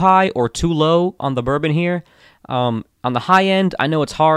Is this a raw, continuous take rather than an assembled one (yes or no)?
no